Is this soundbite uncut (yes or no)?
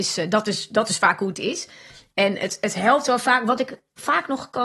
yes